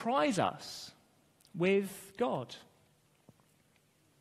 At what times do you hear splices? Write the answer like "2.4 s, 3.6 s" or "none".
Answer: none

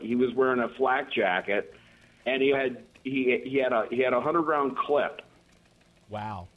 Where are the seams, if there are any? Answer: 2.5 s

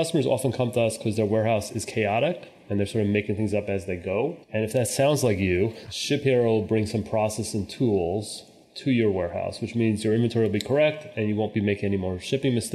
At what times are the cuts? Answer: 4.4 s

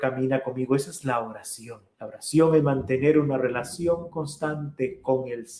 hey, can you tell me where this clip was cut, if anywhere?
1.9 s

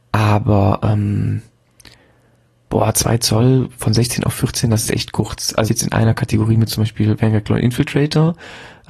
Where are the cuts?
4.9 s, 5.7 s

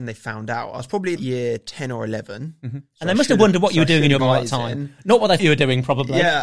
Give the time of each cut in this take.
1.2 s, 4.2 s, 5.4 s

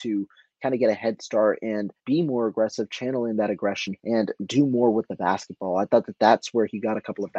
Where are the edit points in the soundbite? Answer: 2.0 s, 4.0 s

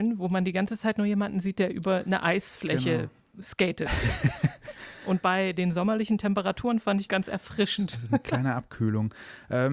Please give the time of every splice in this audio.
7.1 s

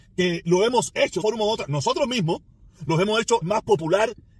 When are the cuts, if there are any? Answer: 1.2 s, 3.4 s

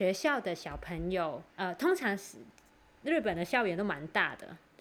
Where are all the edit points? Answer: 1.5 s

